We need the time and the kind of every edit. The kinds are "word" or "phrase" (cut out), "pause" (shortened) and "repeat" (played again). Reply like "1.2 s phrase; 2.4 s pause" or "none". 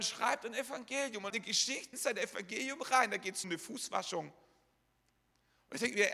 1.3 s word; 1.9 s word; 3.4 s word